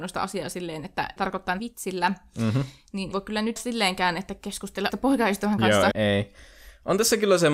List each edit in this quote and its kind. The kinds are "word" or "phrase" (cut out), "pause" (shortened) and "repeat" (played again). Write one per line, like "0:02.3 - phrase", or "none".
0:01.2 - phrase
0:01.6 - word
0:03.1 - word
0:03.6 - phrase
0:04.9 - word
0:05.9 - word